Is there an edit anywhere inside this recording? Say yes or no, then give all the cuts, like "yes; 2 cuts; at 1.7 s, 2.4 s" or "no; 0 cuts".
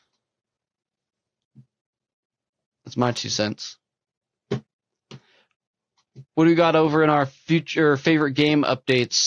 yes; 1 cut; at 6.3 s